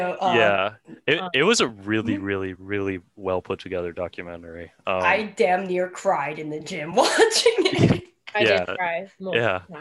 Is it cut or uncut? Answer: uncut